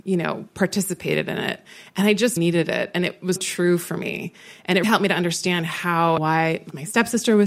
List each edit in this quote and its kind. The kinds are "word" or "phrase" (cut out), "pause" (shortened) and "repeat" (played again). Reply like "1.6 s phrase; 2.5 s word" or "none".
2.4 s word; 3.4 s word; 4.8 s word; 6.2 s word